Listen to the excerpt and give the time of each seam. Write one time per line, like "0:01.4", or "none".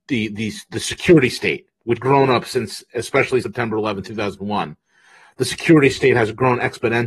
0:02.0
0:03.4